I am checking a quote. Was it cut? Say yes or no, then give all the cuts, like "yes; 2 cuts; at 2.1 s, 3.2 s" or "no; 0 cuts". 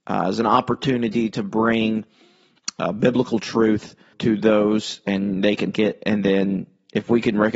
yes; 2 cuts; at 4.1 s, 5.7 s